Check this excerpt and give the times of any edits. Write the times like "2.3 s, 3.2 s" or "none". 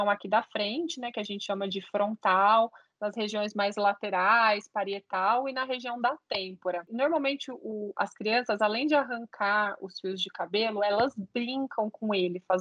none